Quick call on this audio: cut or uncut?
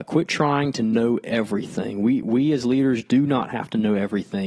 uncut